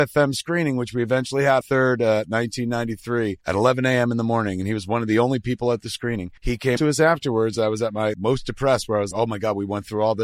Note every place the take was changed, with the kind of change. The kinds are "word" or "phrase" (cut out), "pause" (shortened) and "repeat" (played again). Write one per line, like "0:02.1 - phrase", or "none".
0:01.6 - word
0:03.4 - pause
0:06.4 - pause
0:06.8 - word
0:08.1 - word
0:09.1 - word